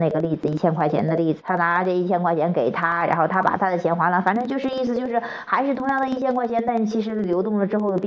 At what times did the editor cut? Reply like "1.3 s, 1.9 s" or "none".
1.4 s